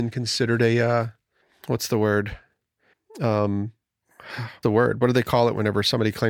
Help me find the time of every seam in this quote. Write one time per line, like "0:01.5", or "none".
0:04.6